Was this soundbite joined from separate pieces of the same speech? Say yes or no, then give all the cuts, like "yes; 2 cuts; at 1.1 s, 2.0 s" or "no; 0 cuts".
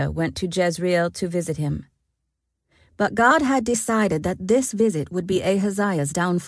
no; 0 cuts